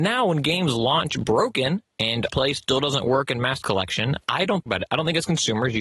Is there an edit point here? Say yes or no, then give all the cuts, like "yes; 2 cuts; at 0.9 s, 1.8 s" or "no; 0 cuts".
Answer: yes; 4 cuts; at 2.3 s, 3.6 s, 4.2 s, 4.7 s